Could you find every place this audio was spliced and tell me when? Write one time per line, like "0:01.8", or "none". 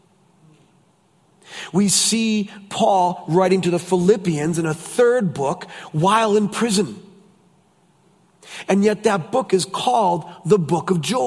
none